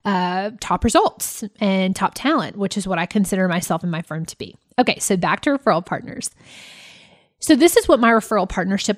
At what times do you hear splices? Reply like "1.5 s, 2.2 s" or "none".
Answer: none